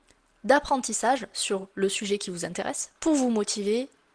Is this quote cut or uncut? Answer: cut